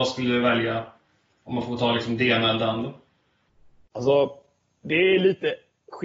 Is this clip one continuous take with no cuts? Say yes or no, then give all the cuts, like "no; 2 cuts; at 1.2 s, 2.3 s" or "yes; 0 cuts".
yes; 0 cuts